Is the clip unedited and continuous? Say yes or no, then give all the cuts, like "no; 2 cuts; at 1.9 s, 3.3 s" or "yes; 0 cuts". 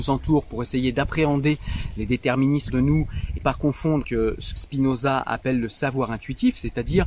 no; 4 cuts; at 2.7 s, 3.4 s, 4.0 s, 4.6 s